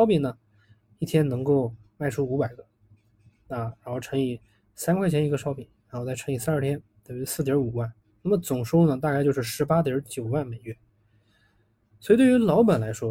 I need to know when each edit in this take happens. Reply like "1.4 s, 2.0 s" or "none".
none

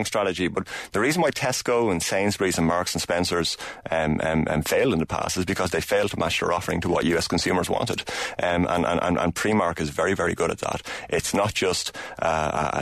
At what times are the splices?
none

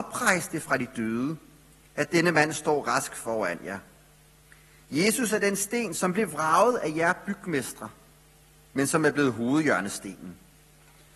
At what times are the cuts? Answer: none

